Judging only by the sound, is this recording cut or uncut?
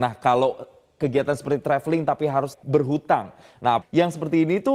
cut